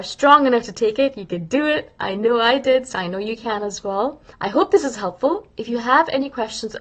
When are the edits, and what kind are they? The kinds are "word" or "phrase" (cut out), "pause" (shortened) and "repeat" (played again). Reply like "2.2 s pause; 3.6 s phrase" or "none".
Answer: 4.3 s pause